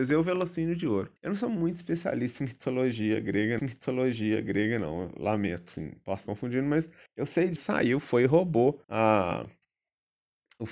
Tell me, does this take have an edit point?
yes; 6 cuts; at 1.2 s, 3.6 s, 6.2 s, 7.1 s, 7.6 s, 8.8 s

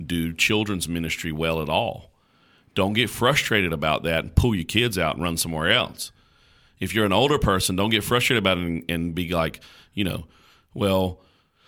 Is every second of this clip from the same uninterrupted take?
yes; 0 cuts

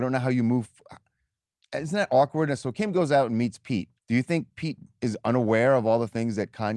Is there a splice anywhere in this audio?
yes; 1 cut; at 4.0 s

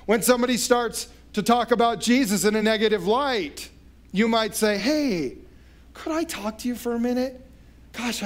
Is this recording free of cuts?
yes; 0 cuts

